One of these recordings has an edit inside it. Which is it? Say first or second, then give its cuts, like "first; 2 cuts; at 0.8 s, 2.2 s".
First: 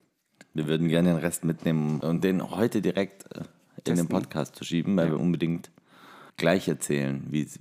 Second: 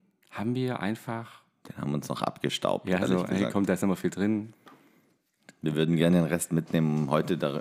first; 4 cuts; at 2.0 s, 3.4 s, 5.2 s, 6.3 s